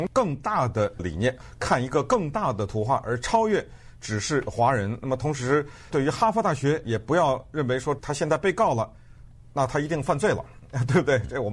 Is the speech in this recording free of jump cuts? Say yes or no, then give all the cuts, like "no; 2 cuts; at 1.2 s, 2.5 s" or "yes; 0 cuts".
yes; 0 cuts